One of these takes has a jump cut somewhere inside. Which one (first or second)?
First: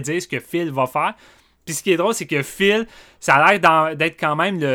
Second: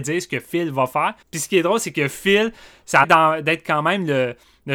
second